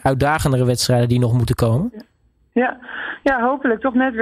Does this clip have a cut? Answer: no; 0 cuts

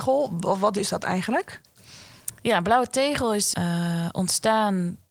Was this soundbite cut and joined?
yes; 1 cut; at 3.5 s

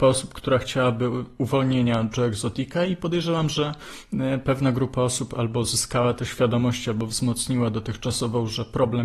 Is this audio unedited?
yes; 0 cuts

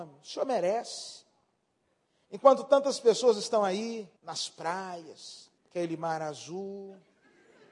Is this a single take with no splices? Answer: no; 2 cuts; at 4.2 s, 5.6 s

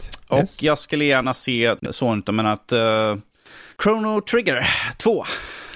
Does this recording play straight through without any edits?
no; 2 cuts; at 1.9 s, 3.7 s

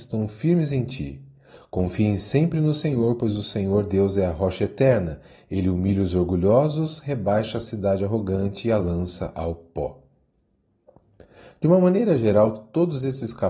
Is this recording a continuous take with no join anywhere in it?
yes; 0 cuts

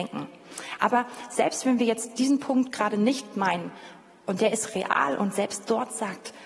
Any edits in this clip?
no; 0 cuts

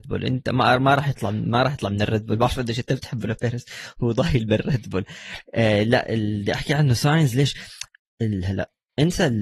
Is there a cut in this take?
no; 0 cuts

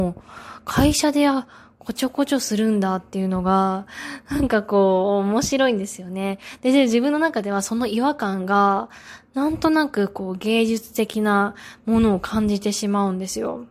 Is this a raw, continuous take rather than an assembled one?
yes; 0 cuts

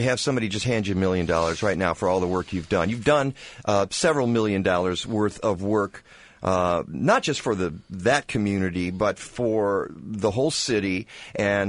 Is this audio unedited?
yes; 0 cuts

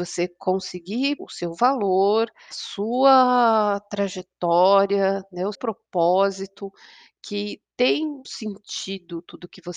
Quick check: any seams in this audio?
yes; 4 cuts; at 1.2 s, 2.5 s, 5.5 s, 8.2 s

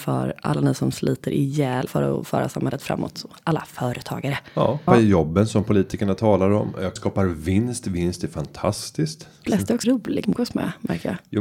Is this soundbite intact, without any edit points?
no; 6 cuts; at 1.9 s, 4.9 s, 7.0 s, 9.5 s, 9.8 s, 10.2 s

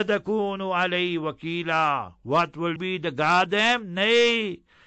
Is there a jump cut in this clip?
yes; 2 cuts; at 2.8 s, 3.5 s

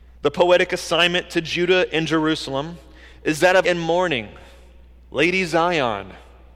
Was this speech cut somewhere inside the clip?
yes; 1 cut; at 3.6 s

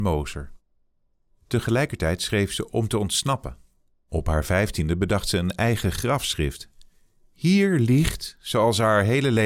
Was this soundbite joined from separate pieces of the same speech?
no; 0 cuts

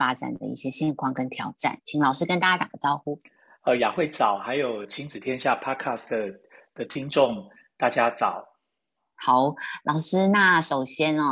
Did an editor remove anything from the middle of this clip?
no; 0 cuts

